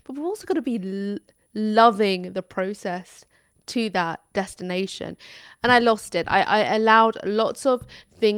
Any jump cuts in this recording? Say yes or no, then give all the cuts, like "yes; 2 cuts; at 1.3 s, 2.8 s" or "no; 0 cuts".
no; 0 cuts